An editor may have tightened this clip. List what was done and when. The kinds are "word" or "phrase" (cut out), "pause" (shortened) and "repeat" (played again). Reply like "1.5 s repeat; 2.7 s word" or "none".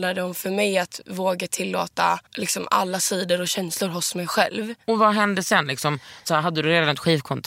2.3 s pause